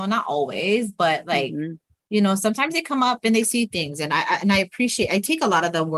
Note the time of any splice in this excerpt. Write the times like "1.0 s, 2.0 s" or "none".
none